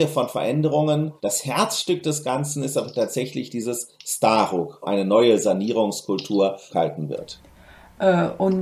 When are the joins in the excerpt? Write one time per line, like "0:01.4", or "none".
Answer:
0:01.2
0:04.8
0:06.7